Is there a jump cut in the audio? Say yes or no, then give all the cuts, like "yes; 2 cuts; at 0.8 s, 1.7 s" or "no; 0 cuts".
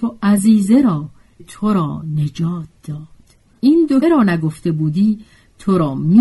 yes; 3 cuts; at 1.4 s, 3.6 s, 4.0 s